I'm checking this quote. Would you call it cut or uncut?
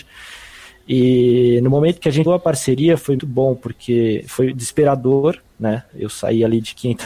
cut